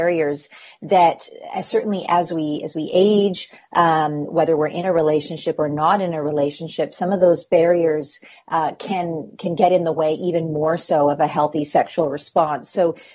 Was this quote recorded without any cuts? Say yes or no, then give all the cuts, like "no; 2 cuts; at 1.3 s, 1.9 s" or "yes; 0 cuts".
yes; 0 cuts